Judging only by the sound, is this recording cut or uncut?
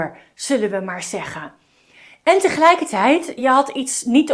uncut